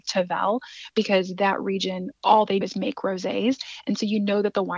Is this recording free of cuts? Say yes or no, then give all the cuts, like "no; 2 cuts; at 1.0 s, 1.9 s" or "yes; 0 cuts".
no; 2 cuts; at 2.1 s, 2.6 s